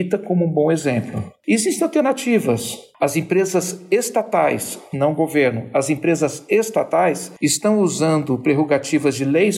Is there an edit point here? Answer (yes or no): no